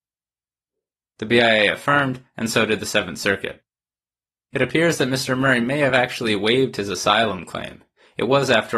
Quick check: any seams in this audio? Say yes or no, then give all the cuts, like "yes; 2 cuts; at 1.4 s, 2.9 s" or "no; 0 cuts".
no; 0 cuts